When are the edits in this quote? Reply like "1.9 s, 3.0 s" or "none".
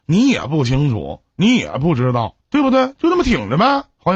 2.4 s